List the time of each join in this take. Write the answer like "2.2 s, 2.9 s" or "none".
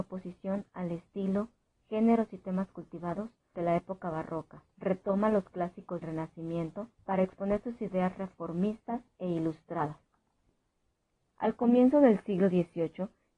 3.5 s, 4.7 s, 6.0 s, 6.9 s